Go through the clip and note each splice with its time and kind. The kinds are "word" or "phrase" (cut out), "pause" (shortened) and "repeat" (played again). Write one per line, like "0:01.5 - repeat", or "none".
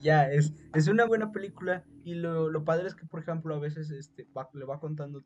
0:01.1 - word